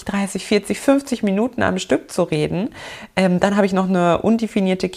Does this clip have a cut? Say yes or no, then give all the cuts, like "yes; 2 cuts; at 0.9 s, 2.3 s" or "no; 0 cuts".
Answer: no; 0 cuts